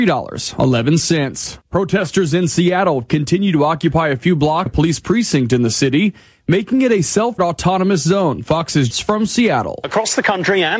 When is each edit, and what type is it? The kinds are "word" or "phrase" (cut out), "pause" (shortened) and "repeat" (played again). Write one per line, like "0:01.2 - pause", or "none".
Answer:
0:01.6 - pause
0:04.7 - word
0:07.4 - word
0:08.9 - phrase